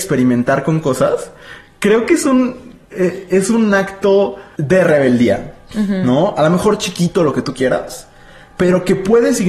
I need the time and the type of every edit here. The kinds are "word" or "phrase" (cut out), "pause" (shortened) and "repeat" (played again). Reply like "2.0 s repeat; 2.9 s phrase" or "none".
none